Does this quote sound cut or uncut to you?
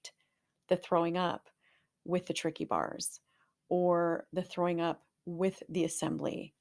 uncut